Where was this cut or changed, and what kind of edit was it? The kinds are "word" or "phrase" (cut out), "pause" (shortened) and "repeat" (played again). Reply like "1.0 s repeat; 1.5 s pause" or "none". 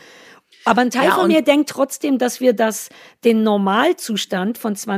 none

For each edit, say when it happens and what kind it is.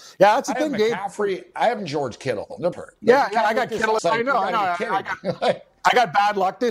1.8 s word; 2.7 s word; 4.0 s phrase

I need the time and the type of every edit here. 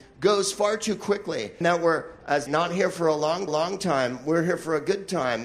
1.6 s word; 2.5 s phrase; 3.5 s repeat

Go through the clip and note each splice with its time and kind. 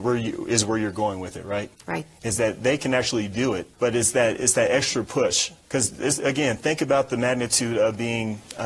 1.8 s pause; 3.7 s pause; 5.6 s pause

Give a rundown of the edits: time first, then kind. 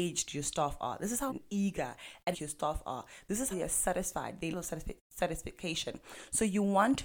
1.3 s word; 2.3 s word; 3.5 s word; 4.5 s word

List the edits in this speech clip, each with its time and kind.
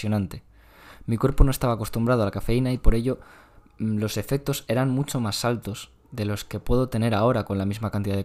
none

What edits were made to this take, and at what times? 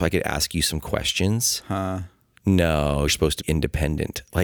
3.1 s word; 3.4 s word

